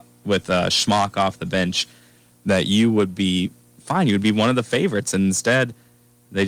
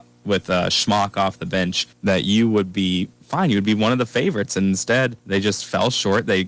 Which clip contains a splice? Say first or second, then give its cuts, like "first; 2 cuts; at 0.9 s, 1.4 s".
second; 3 cuts; at 1.9 s, 3.1 s, 5.2 s